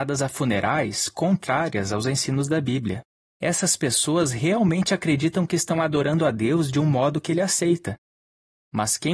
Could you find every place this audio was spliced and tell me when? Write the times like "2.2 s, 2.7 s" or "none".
3.2 s